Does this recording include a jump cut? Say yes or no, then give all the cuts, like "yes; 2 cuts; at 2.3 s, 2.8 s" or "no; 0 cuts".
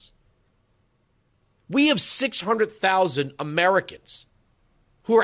no; 0 cuts